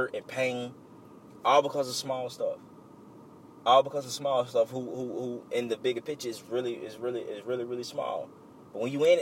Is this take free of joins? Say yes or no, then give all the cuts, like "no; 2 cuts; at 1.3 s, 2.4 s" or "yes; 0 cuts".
yes; 0 cuts